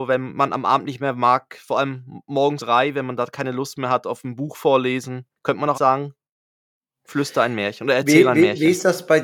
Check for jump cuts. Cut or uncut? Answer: cut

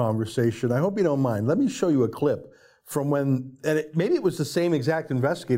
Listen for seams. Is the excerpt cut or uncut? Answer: uncut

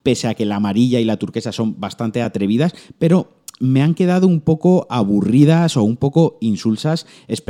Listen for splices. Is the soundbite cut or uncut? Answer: uncut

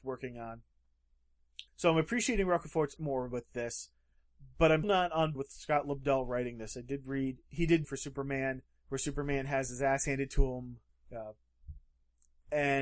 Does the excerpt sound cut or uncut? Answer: cut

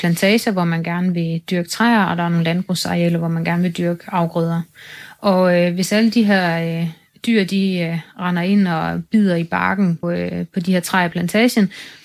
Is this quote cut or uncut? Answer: cut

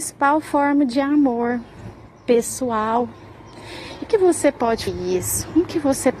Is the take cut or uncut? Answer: cut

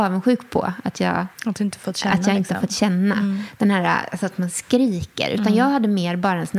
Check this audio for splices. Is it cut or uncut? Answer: cut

